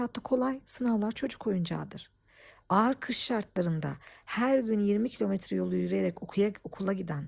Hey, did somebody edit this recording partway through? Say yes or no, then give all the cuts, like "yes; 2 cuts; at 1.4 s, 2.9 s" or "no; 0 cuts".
no; 0 cuts